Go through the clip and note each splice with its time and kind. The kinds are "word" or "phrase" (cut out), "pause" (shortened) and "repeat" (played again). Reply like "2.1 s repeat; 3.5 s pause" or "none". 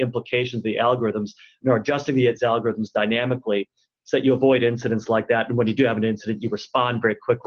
none